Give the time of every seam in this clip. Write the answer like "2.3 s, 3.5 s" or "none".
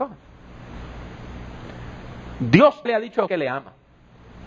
2.9 s, 3.3 s